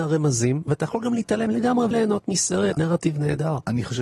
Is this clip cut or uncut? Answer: cut